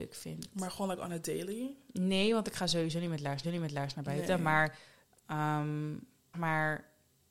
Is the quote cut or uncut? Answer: cut